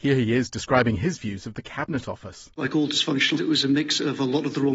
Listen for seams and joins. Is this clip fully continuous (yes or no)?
no